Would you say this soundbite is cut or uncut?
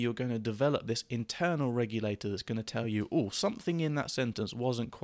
uncut